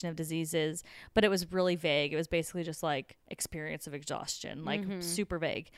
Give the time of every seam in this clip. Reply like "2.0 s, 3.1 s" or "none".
3.2 s